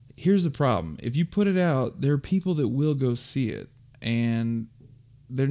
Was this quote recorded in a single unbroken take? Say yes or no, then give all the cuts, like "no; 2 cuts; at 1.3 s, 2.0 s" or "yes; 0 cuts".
yes; 0 cuts